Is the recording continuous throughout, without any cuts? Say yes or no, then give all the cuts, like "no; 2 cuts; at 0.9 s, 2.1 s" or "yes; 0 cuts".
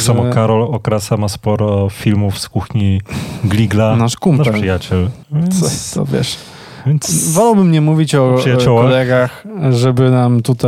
no; 1 cut; at 5.2 s